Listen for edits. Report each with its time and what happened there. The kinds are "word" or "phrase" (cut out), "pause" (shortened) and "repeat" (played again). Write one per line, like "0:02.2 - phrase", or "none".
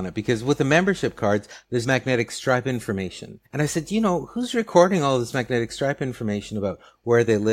0:01.8 - word
0:03.4 - pause